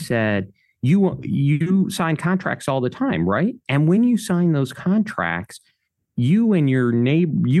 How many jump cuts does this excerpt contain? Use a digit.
0